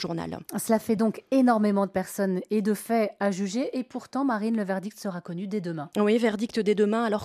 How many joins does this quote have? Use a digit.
0